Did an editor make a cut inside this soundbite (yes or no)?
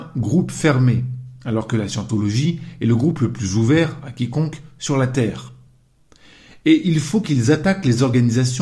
no